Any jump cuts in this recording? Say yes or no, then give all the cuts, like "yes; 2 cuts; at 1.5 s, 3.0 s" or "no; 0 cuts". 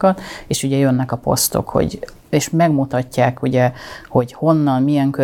no; 0 cuts